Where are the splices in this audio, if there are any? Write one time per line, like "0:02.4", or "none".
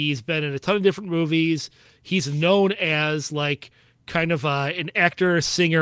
none